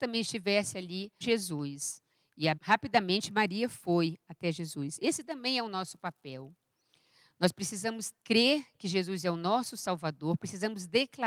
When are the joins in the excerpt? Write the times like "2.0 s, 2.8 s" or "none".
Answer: 1.2 s, 2.6 s, 8.2 s